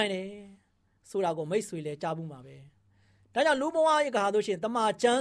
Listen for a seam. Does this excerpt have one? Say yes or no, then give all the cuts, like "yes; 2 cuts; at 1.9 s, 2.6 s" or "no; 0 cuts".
no; 0 cuts